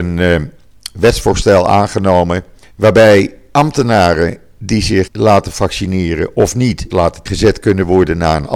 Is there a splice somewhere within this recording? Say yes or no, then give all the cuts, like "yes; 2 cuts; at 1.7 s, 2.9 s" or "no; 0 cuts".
yes; 4 cuts; at 2.6 s, 5.1 s, 6.9 s, 7.3 s